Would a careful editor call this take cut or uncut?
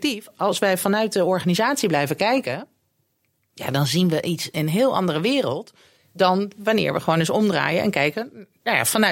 uncut